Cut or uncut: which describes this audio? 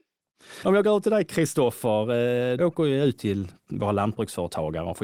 cut